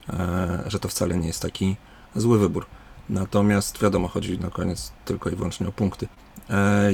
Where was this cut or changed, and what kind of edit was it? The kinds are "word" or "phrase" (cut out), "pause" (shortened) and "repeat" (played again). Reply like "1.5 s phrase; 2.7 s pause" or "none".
none